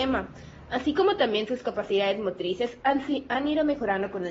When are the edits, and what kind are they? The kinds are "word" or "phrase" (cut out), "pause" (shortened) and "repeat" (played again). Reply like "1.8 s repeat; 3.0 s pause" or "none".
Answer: none